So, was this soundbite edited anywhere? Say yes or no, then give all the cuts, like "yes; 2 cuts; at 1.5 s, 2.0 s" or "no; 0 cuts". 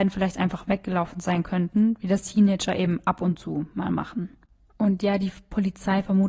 no; 0 cuts